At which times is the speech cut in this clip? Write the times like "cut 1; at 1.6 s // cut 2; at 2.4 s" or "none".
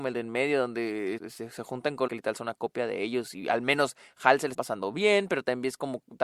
cut 1; at 1.2 s // cut 2; at 2.1 s // cut 3; at 4.5 s